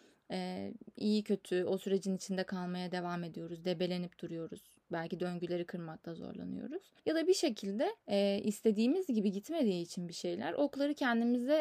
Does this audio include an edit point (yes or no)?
yes